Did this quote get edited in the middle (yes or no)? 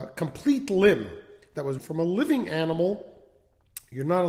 yes